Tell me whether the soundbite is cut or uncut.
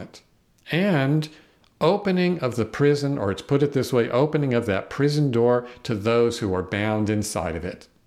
uncut